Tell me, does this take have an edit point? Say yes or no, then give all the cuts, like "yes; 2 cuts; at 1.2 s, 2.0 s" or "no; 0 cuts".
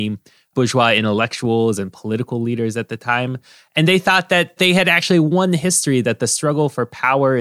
no; 0 cuts